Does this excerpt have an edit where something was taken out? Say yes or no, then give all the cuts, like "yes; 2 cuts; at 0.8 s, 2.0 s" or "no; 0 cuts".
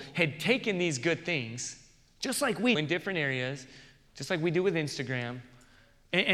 yes; 1 cut; at 2.7 s